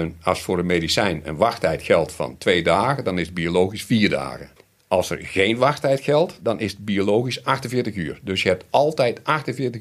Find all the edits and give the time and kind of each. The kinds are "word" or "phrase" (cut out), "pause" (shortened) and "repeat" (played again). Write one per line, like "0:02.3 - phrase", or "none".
0:04.6 - pause